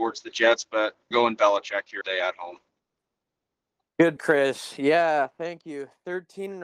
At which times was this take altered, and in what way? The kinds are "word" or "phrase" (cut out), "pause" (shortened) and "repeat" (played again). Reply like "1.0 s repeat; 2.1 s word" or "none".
1.1 s word; 2.0 s word; 4.2 s word